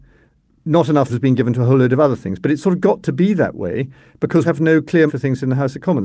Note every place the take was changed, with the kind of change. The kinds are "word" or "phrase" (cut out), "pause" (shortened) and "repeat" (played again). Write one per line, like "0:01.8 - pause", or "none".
0:01.1 - word
0:04.4 - word
0:05.1 - word